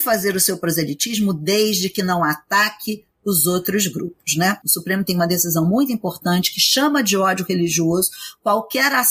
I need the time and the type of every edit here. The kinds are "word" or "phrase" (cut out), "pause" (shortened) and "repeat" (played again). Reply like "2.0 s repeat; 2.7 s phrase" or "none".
none

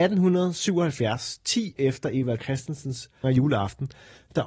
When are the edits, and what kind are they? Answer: 1.8 s word; 2.4 s word; 3.2 s word

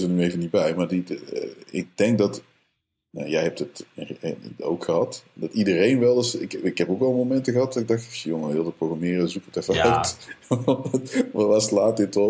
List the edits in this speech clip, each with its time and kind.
none

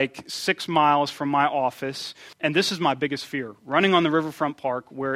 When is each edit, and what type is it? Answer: 2.3 s pause

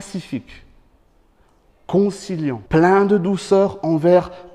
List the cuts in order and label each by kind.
2.7 s pause

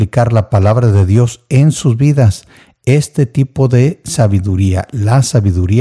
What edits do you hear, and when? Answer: none

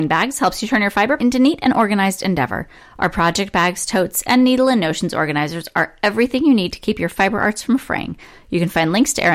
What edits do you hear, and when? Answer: 1.2 s word

